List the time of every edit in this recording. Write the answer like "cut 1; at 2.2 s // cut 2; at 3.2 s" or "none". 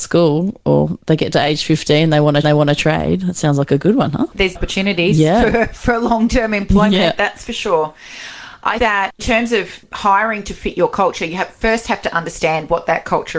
cut 1; at 2.4 s // cut 2; at 4.5 s // cut 3; at 8.8 s // cut 4; at 9.2 s

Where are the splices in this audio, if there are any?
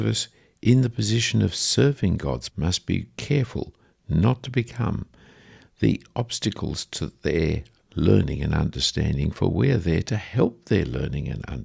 cut 1; at 2.5 s

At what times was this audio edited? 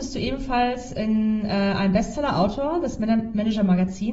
none

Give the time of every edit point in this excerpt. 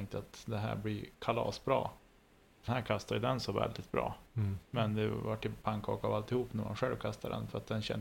cut 1; at 2.7 s

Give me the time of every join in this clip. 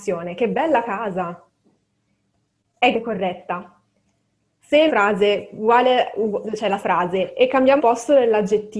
cut 1; at 2.9 s // cut 2; at 4.9 s // cut 3; at 6.8 s // cut 4; at 7.8 s

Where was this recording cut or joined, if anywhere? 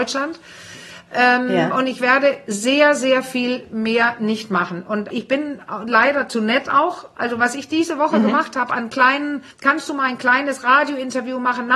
cut 1; at 5.1 s // cut 2; at 9.5 s

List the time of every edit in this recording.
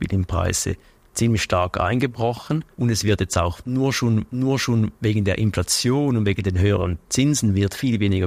cut 1; at 2.7 s // cut 2; at 4.3 s

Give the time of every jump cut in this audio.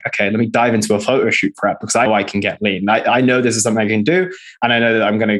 cut 1; at 2.1 s

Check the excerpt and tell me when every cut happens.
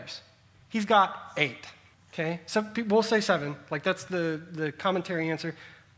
cut 1; at 1.9 s

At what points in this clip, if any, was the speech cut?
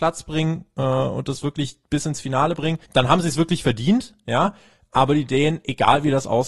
cut 1; at 2.8 s

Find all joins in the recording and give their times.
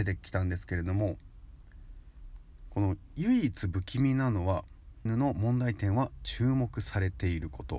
cut 1; at 5.1 s

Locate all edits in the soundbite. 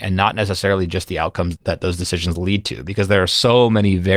cut 1; at 1.6 s

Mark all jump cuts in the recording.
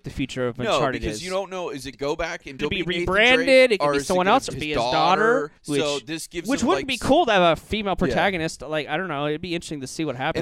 cut 1; at 1.9 s // cut 2; at 2.6 s // cut 3; at 4.5 s // cut 4; at 5.6 s

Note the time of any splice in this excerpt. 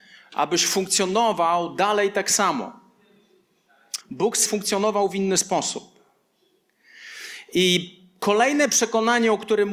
cut 1; at 4.0 s // cut 2; at 4.5 s

